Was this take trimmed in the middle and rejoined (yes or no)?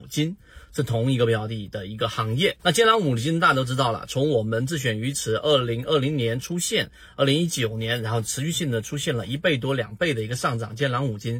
yes